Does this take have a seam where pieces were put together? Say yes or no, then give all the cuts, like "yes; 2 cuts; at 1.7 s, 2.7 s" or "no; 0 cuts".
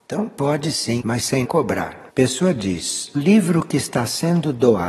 yes; 4 cuts; at 1.0 s, 1.4 s, 2.1 s, 3.1 s